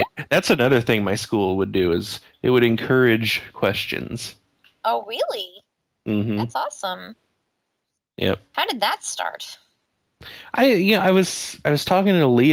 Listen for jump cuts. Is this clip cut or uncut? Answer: uncut